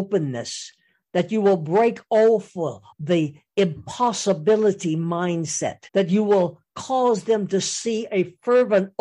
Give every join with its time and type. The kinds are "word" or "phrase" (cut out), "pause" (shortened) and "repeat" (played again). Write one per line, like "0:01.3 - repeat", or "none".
0:02.9 - word
0:05.9 - pause